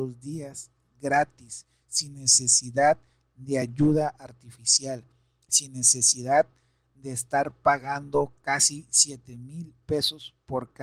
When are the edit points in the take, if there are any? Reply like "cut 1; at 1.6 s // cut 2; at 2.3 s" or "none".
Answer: none